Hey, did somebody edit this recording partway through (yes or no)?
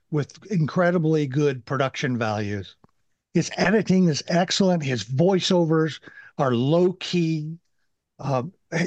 no